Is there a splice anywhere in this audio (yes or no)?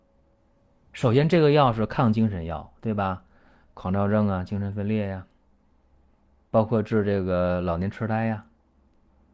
no